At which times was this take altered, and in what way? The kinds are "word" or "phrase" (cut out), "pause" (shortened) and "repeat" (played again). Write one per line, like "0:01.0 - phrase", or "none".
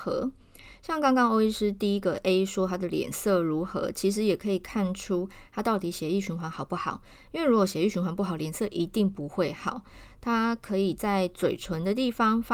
none